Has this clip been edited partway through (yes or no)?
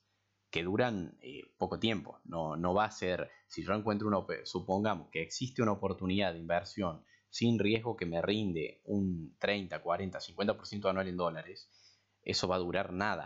no